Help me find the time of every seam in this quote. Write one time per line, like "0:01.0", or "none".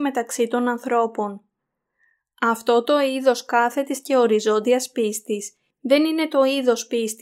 none